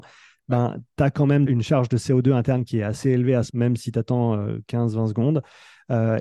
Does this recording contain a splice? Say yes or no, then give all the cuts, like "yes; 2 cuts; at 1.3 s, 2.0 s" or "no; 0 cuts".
yes; 2 cuts; at 1.5 s, 3.5 s